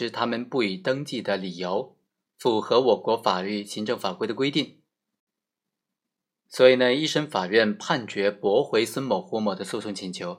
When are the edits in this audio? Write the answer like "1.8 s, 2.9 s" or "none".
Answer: none